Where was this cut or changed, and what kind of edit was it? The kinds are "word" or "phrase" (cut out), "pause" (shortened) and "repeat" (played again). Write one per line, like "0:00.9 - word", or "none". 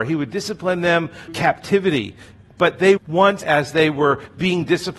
0:01.3 - word
0:03.0 - word
0:03.4 - word